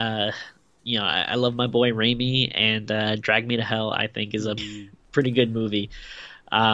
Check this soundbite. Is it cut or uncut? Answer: cut